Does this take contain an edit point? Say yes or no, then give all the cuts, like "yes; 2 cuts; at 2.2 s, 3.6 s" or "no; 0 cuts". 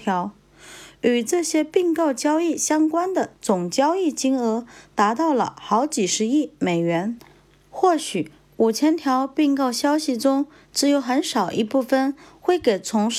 no; 0 cuts